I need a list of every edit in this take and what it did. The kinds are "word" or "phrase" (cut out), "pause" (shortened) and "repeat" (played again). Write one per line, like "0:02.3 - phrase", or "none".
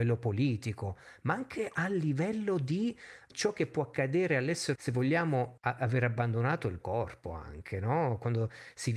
0:03.3 - word
0:04.7 - word
0:05.6 - word
0:06.8 - word